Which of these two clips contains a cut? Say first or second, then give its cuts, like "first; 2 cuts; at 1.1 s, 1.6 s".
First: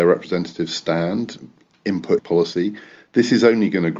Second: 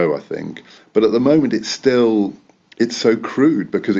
first; 1 cut; at 2.2 s